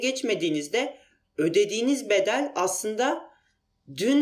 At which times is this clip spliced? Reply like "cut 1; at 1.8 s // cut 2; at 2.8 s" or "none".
none